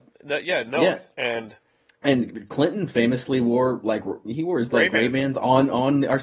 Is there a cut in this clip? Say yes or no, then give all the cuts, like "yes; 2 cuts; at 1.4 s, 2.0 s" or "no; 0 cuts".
no; 0 cuts